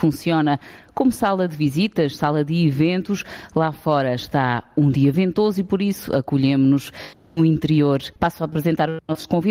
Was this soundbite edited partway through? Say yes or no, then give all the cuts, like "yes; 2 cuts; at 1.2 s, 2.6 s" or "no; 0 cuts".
yes; 1 cut; at 8.2 s